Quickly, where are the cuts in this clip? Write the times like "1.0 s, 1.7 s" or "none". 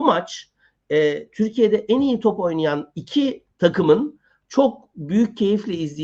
3.5 s